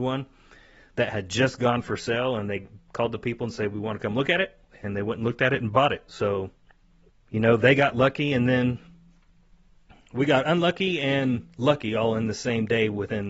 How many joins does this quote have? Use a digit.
0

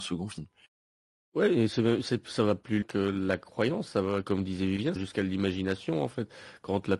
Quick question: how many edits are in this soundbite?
3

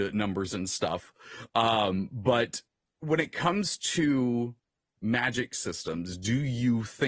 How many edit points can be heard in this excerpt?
0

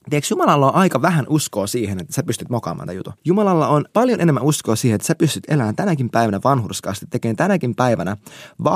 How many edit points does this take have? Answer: 2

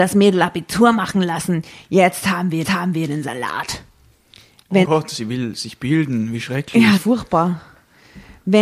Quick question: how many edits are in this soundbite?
3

